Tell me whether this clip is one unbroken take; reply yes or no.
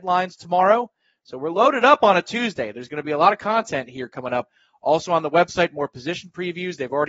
yes